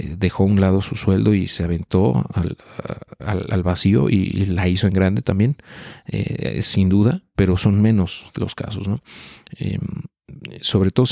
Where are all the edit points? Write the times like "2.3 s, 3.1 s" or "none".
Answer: none